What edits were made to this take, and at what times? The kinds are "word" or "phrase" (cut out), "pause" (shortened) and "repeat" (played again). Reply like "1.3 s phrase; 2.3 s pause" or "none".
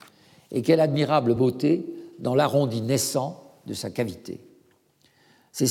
none